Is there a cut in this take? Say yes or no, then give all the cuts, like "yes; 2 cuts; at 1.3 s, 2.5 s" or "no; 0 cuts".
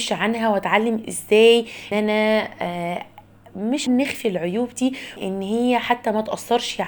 yes; 3 cuts; at 1.9 s, 3.9 s, 5.2 s